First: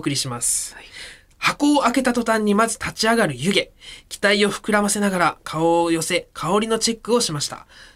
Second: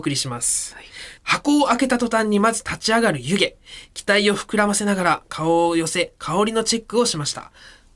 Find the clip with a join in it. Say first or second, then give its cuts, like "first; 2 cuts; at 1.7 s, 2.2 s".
second; 1 cut; at 1.2 s